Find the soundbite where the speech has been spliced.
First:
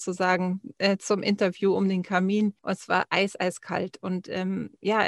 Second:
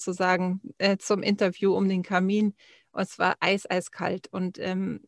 first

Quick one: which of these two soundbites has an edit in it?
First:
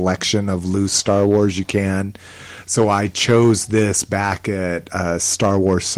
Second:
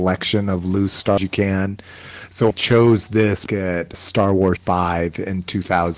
second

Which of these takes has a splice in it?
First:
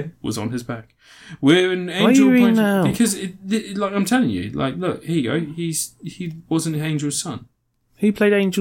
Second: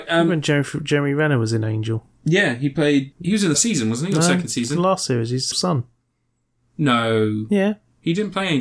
second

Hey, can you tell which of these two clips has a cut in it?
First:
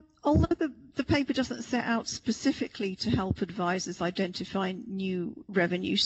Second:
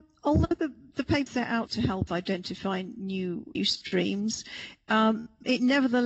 second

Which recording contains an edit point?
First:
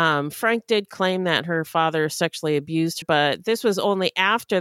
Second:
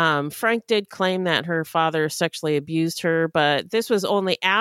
first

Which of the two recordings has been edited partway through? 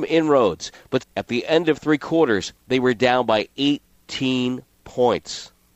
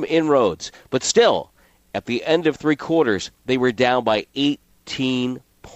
first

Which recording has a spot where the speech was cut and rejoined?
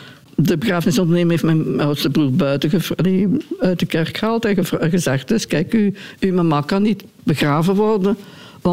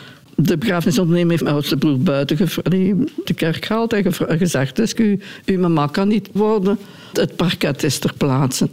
second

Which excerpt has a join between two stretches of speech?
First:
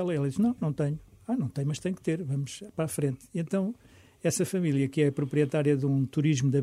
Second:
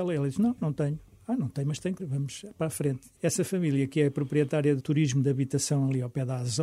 second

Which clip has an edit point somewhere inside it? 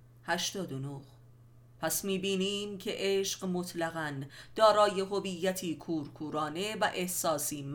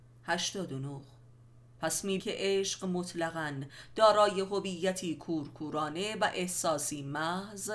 second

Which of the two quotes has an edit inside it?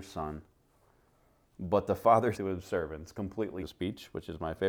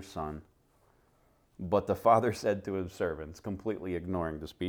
first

